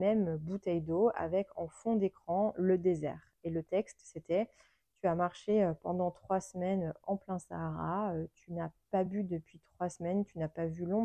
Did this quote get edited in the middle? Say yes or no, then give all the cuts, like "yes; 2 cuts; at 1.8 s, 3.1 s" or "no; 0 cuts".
no; 0 cuts